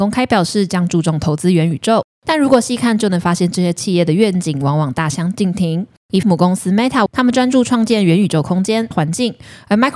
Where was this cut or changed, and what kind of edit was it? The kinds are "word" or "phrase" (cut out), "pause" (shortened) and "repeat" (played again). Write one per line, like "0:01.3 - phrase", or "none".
0:06.2 - word
0:07.1 - phrase
0:08.9 - word